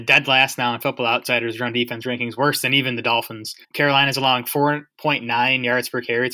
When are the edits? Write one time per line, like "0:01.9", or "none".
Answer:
0:03.6